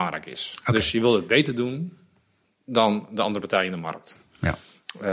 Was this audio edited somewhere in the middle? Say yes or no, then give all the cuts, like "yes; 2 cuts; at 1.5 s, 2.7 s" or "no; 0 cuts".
no; 0 cuts